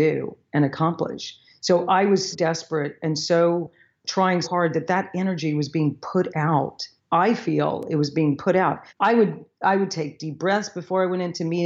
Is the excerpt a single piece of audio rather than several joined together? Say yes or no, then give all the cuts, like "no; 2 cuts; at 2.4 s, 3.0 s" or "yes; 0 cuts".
no; 4 cuts; at 2.3 s, 4.4 s, 7.0 s, 8.9 s